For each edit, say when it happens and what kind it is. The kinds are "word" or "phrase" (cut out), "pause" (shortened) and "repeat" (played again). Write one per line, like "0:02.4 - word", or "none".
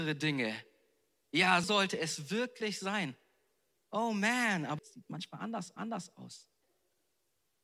0:01.6 - word
0:04.8 - phrase
0:05.8 - repeat